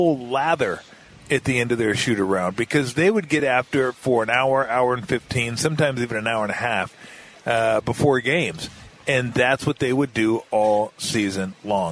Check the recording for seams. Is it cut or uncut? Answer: uncut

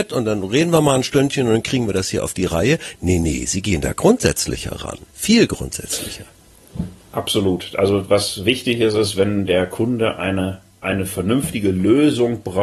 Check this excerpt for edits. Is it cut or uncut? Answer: cut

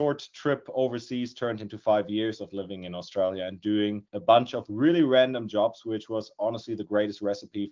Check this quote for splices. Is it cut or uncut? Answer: cut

